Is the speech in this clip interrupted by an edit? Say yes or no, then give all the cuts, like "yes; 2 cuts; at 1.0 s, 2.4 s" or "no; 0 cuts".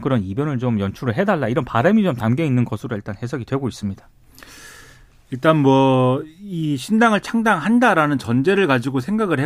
no; 0 cuts